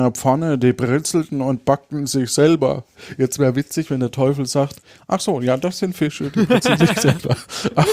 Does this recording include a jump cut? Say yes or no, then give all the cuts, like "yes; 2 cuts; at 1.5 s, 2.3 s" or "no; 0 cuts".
no; 0 cuts